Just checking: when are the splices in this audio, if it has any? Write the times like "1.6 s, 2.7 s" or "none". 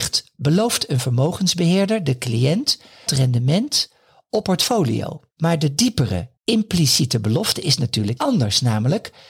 3.1 s, 4.4 s, 5.3 s, 6.4 s, 8.2 s